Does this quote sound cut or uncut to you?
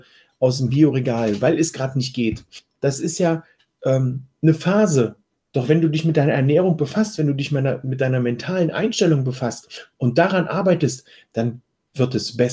uncut